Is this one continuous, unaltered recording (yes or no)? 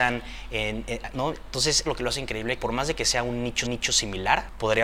no